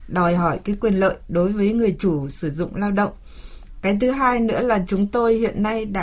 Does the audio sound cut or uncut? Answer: uncut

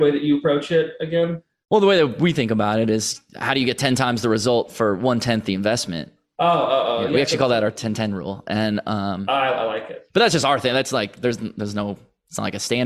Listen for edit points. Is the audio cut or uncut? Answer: uncut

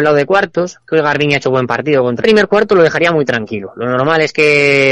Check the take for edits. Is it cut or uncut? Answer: cut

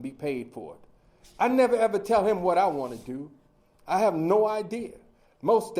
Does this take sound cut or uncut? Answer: uncut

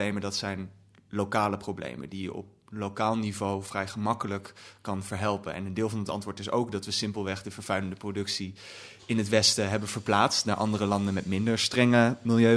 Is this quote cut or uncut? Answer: uncut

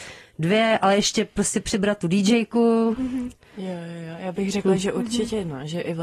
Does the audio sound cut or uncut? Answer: uncut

